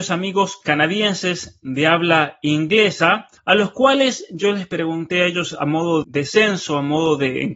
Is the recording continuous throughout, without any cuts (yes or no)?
no